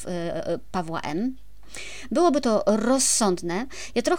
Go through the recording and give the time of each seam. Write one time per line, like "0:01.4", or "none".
none

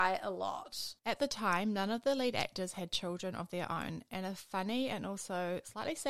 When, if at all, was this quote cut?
none

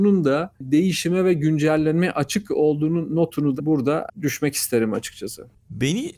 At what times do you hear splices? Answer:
0:03.6

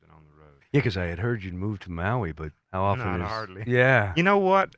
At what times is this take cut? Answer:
0:02.6

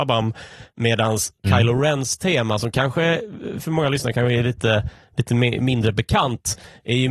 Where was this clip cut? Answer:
0:01.4

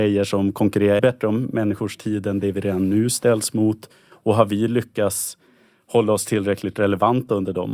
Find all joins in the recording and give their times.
0:01.0

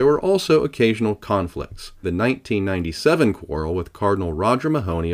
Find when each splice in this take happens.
0:02.0

